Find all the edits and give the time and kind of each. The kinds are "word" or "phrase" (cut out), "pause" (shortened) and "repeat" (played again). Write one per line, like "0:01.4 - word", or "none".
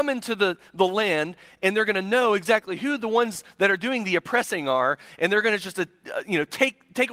none